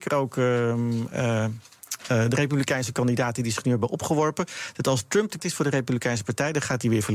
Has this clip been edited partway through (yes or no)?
yes